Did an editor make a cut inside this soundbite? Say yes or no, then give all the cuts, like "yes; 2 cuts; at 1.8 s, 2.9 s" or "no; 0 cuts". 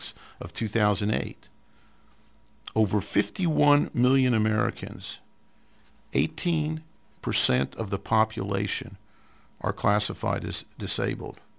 no; 0 cuts